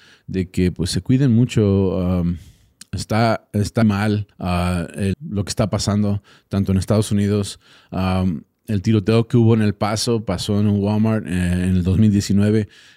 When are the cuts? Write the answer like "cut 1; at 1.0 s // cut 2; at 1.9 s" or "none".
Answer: cut 1; at 3.8 s // cut 2; at 4.3 s // cut 3; at 5.1 s